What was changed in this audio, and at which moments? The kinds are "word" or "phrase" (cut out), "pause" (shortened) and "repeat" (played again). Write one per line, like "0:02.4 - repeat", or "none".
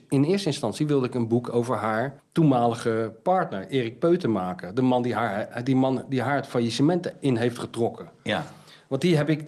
0:02.2 - pause